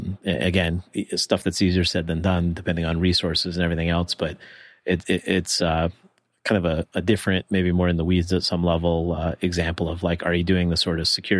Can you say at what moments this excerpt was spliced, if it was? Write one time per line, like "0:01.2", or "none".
none